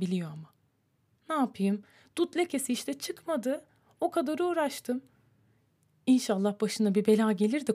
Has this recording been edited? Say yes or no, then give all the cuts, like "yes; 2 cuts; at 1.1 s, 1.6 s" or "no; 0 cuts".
no; 0 cuts